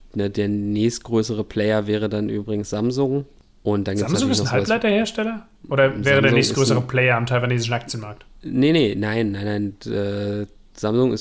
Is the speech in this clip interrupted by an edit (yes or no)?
no